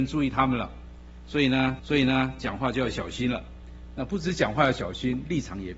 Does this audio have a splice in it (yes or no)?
yes